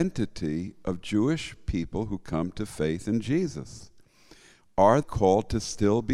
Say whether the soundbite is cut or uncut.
cut